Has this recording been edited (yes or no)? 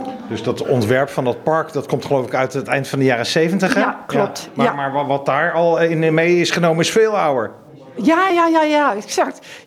yes